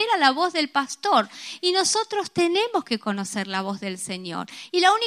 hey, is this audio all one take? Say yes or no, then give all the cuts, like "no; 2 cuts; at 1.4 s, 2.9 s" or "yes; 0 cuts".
yes; 0 cuts